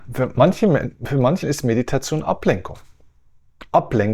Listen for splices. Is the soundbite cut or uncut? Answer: cut